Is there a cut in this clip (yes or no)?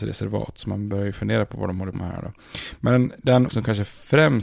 yes